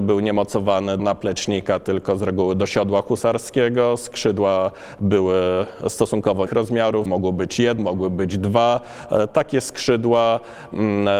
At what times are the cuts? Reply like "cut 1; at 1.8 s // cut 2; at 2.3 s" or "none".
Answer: cut 1; at 1.0 s // cut 2; at 6.5 s // cut 3; at 7.1 s // cut 4; at 7.8 s